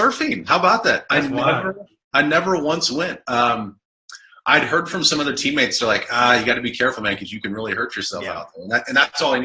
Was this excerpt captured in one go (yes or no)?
yes